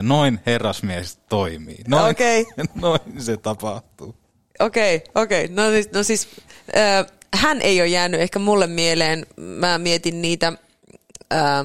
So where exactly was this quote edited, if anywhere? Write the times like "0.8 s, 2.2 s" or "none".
none